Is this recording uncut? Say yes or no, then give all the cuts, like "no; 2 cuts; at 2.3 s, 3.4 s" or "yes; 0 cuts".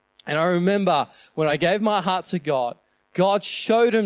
yes; 0 cuts